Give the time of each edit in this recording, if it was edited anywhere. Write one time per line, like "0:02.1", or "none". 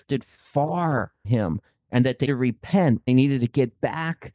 0:01.2
0:02.2
0:03.1